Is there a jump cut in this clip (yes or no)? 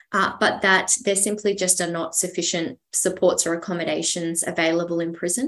no